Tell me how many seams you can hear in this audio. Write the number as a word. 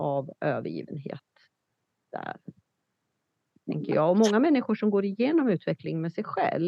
zero